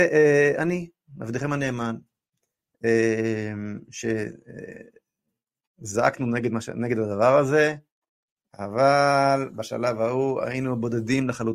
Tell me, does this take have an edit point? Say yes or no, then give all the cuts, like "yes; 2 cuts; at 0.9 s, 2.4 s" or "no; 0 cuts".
no; 0 cuts